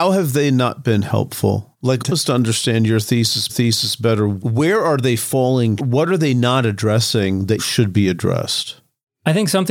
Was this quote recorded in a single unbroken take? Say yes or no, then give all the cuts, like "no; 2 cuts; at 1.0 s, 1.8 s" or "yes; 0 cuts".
no; 5 cuts; at 1.7 s, 2.1 s, 3.5 s, 5.8 s, 7.6 s